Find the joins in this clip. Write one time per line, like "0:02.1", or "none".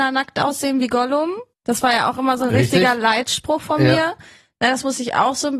0:01.5